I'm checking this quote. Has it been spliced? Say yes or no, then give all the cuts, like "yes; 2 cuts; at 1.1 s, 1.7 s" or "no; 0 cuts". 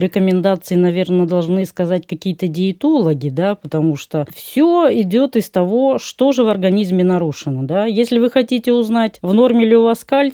no; 0 cuts